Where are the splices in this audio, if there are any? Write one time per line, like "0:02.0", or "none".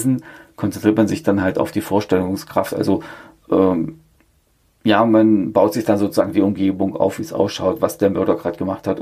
none